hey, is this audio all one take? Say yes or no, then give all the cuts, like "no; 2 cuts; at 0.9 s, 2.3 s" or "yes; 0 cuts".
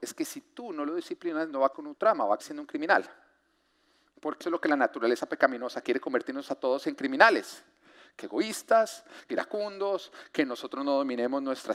no; 6 cuts; at 1.7 s, 2.4 s, 4.4 s, 5.8 s, 8.2 s, 9.3 s